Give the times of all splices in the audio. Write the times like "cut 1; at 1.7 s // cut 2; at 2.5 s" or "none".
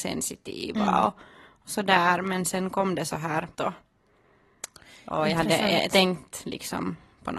cut 1; at 3.5 s